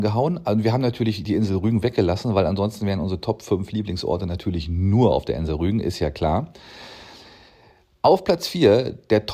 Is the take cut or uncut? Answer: uncut